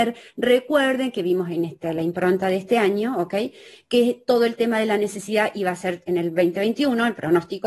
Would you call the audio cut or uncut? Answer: uncut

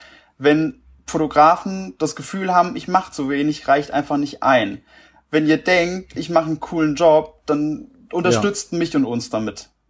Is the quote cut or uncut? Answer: uncut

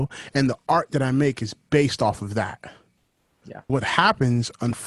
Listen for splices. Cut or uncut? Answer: cut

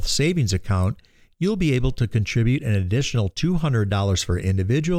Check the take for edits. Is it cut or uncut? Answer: uncut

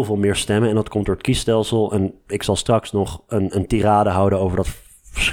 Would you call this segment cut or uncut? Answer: uncut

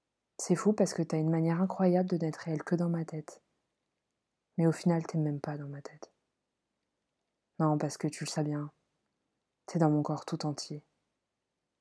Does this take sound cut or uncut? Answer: cut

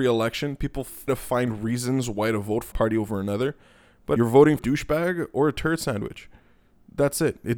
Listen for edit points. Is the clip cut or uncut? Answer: cut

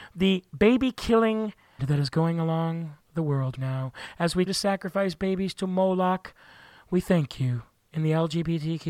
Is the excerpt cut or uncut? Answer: cut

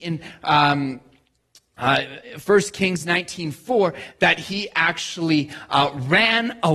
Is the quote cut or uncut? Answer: uncut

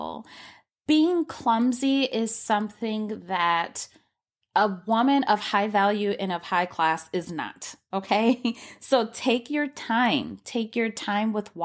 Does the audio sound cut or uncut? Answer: uncut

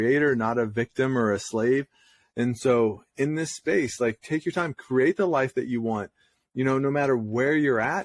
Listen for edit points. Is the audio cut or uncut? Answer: uncut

